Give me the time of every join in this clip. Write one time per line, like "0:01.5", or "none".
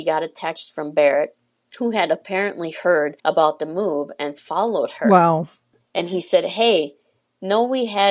0:03.2

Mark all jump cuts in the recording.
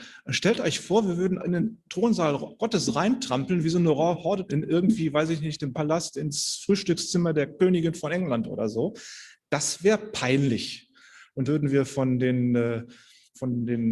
0:01.4
0:04.5
0:05.7
0:11.4

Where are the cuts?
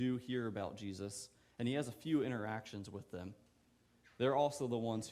none

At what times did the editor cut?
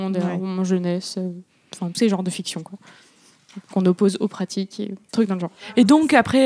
0:01.9
0:05.1

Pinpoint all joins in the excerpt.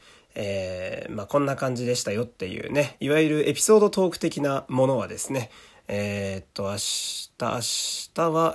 none

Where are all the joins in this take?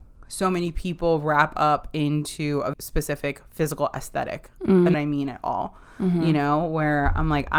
0:02.7
0:04.9

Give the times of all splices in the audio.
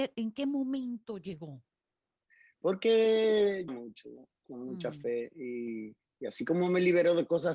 0:03.7

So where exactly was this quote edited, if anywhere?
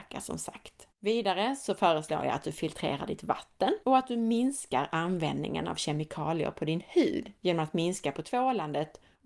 0:00.9
0:03.8
0:07.4

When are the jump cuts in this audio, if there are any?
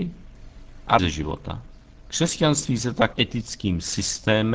0:01.0
0:03.1

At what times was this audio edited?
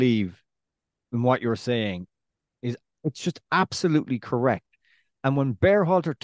none

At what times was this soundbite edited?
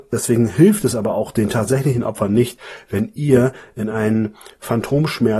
none

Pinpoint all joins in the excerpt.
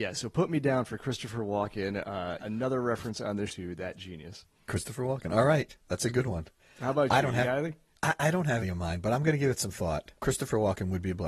0:02.4
0:03.5
0:08.6

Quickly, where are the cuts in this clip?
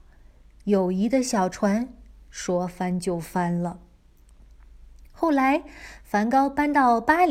none

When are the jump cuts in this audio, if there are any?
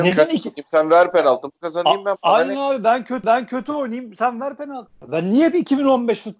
0:03.2

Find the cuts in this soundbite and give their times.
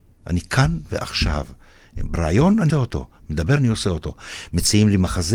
0:02.1
0:02.7
0:03.6

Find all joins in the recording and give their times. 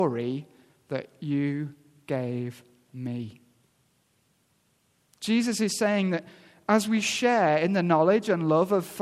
none

